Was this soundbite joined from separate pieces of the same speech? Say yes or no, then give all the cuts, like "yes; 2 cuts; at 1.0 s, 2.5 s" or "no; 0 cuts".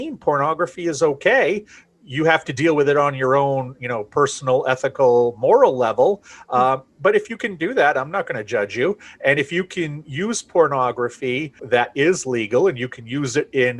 yes; 1 cut; at 11.6 s